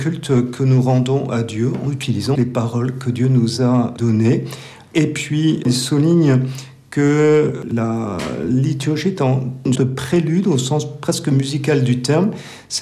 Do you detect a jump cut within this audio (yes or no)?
yes